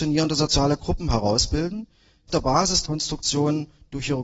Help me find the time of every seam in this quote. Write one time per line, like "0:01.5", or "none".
0:02.3
0:02.9